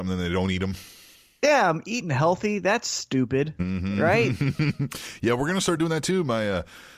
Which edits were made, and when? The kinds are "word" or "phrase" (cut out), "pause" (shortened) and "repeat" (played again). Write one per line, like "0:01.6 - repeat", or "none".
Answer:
none